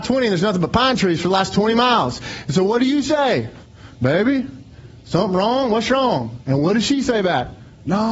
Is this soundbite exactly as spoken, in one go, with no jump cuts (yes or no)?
yes